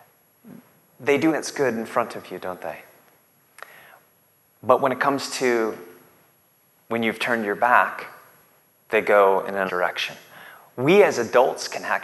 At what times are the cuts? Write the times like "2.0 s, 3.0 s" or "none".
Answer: 1.3 s, 9.7 s